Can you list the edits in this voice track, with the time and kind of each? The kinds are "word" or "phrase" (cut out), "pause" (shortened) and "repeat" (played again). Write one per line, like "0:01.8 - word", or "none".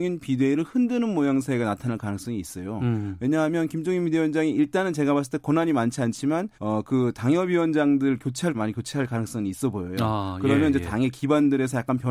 0:06.5 - pause
0:08.5 - word